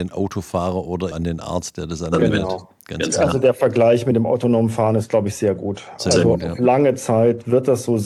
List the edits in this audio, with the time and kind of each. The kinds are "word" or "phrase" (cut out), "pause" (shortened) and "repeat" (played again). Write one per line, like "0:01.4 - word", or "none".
0:01.1 - word